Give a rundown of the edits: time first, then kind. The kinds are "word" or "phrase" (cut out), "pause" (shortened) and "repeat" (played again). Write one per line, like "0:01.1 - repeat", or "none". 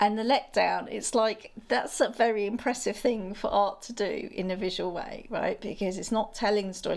none